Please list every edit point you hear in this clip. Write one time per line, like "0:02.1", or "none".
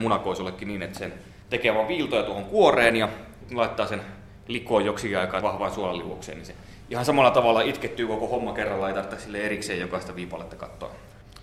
0:05.4